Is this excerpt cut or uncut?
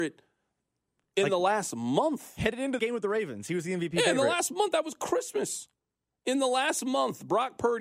cut